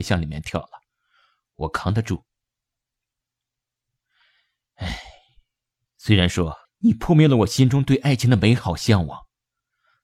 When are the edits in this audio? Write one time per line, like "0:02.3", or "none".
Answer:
0:06.6